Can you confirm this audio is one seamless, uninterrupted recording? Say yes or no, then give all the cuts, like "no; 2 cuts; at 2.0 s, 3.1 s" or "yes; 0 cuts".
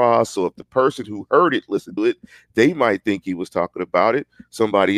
no; 1 cut; at 2.0 s